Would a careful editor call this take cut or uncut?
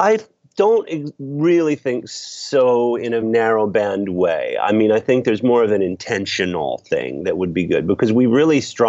cut